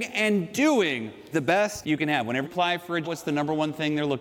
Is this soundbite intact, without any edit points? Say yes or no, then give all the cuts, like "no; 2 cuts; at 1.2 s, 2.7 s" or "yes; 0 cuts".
no; 4 cuts; at 1.3 s, 1.8 s, 2.4 s, 3.0 s